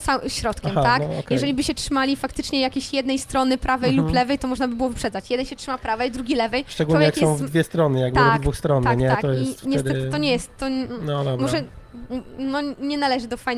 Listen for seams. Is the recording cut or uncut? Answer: uncut